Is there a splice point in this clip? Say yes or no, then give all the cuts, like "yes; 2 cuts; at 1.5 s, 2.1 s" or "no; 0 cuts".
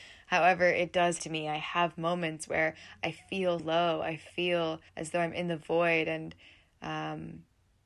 yes; 3 cuts; at 1.2 s, 3.6 s, 4.9 s